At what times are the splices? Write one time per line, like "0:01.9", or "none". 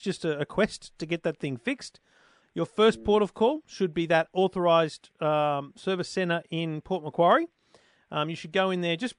none

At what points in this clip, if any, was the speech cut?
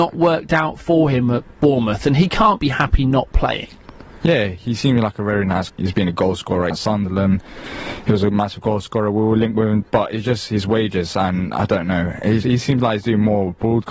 0:05.7
0:06.7
0:09.8
0:12.4

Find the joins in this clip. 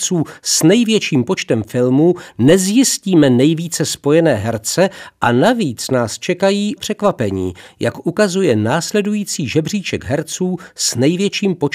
0:06.8

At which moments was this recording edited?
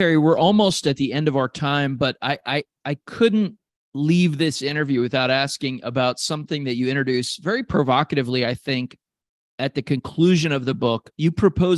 none

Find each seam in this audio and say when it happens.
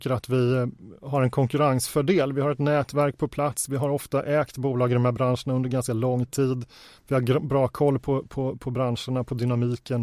none

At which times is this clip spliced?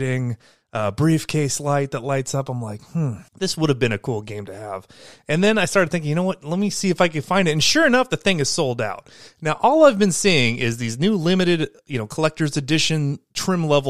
0:03.3

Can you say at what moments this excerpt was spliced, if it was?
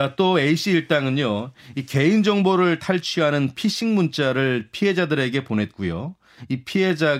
none

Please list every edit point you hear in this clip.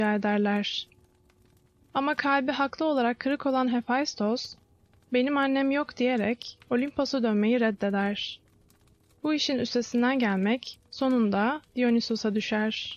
none

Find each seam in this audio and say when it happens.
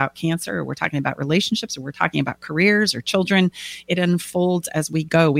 none

